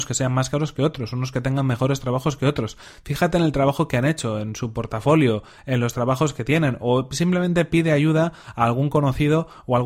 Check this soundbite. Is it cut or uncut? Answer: uncut